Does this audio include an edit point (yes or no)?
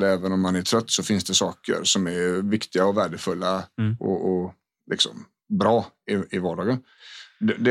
no